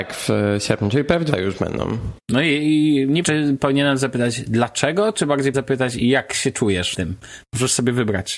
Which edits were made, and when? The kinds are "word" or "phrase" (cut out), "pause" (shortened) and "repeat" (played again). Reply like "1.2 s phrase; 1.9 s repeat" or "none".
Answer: 1.3 s word; 2.2 s pause; 3.2 s word; 5.5 s word; 6.9 s word